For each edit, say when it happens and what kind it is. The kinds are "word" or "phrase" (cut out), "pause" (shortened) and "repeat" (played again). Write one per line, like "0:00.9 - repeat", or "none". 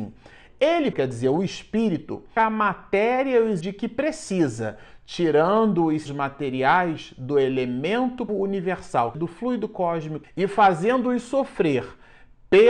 0:00.9 - word
0:02.4 - word
0:03.6 - word
0:06.1 - word
0:08.3 - word
0:09.1 - word
0:10.2 - word